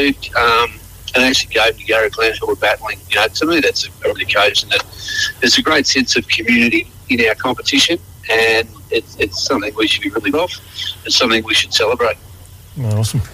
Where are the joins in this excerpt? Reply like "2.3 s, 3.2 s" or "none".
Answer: 4.2 s, 7.0 s, 10.3 s